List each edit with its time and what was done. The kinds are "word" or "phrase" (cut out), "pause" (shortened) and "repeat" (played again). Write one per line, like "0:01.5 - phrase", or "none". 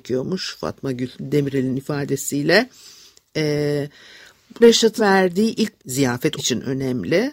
0:01.1 - word
0:04.6 - word
0:05.0 - word
0:05.8 - word
0:06.4 - word